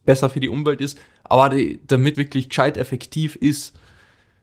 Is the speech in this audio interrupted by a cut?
yes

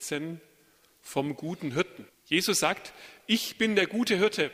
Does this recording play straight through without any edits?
no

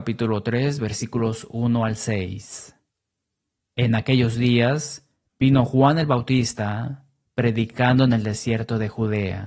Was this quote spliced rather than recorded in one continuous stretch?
no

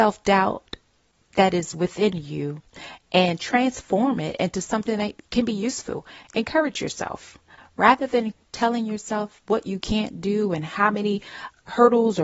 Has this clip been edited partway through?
no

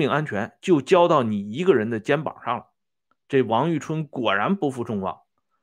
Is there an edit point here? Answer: no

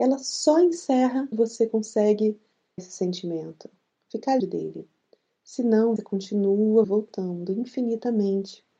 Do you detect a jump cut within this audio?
yes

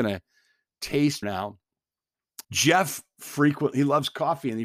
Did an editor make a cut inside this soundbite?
yes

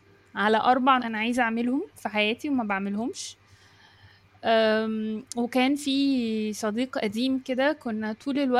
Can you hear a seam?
yes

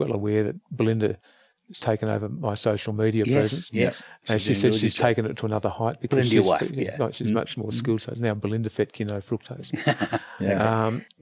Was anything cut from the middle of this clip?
no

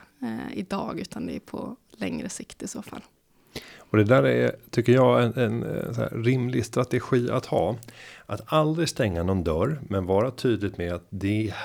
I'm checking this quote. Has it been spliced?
no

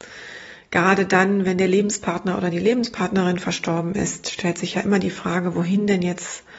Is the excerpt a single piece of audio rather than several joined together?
yes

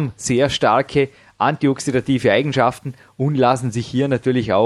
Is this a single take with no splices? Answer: yes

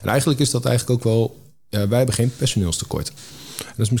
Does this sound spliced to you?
no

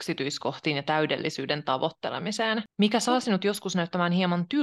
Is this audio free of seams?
yes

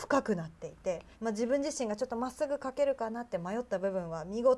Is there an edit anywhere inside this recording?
yes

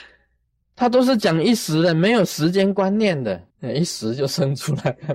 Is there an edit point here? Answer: yes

